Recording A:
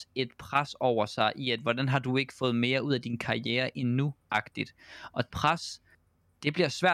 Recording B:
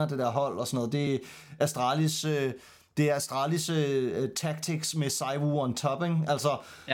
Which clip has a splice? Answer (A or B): A